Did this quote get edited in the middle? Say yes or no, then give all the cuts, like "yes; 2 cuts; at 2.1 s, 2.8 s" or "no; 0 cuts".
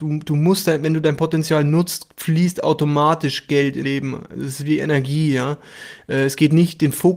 yes; 1 cut; at 3.8 s